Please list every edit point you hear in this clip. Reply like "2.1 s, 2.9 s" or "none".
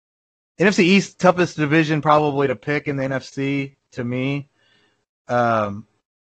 none